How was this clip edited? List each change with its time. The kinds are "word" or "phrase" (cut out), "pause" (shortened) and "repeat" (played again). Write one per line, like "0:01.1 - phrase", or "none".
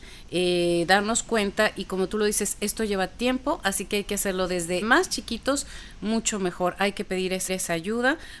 0:04.8 - word
0:07.5 - repeat